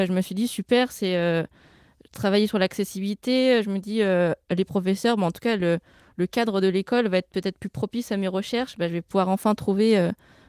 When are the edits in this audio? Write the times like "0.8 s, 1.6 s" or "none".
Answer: none